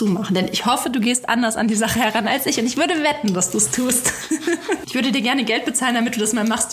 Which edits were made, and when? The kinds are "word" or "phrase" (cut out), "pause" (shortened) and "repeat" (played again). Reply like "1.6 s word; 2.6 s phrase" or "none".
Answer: none